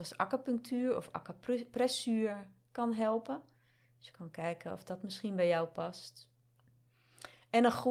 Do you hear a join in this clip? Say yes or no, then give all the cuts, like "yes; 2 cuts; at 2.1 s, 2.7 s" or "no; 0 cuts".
no; 0 cuts